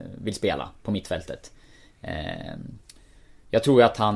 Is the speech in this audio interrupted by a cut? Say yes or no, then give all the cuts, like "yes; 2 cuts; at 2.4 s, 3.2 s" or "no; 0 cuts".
no; 0 cuts